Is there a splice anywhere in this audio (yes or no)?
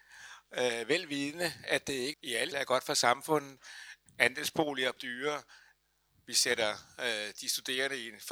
yes